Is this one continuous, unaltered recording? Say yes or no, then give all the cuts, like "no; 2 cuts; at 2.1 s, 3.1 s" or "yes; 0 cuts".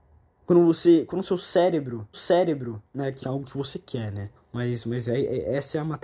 no; 3 cuts; at 2.1 s, 3.2 s, 4.4 s